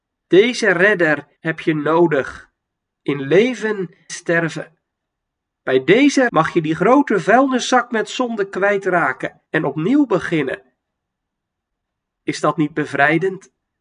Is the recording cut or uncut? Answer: cut